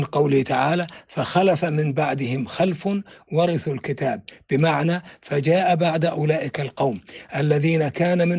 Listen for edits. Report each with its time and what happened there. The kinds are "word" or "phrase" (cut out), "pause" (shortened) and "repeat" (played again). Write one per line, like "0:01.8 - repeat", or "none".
none